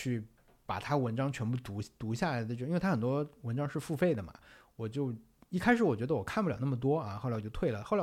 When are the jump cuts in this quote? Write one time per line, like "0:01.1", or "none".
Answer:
none